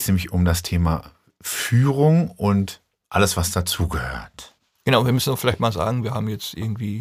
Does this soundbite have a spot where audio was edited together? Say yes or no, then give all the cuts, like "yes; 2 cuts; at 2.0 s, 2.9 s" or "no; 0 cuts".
no; 0 cuts